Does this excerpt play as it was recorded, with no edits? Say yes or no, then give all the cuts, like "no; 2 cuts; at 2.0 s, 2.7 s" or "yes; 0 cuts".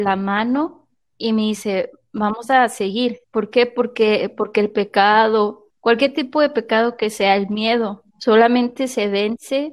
no; 4 cuts; at 1.0 s, 3.2 s, 5.7 s, 8.1 s